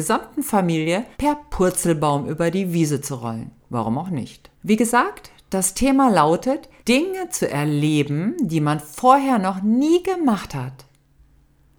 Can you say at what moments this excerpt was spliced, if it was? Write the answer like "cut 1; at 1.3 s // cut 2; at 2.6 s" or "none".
cut 1; at 1.1 s // cut 2; at 3.6 s // cut 3; at 4.5 s // cut 4; at 6.8 s